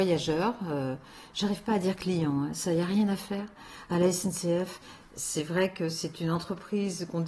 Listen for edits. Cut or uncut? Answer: uncut